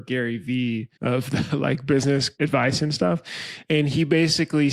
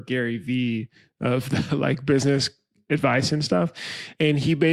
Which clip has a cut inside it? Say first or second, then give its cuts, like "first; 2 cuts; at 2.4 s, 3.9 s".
first; 2 cuts; at 0.9 s, 2.3 s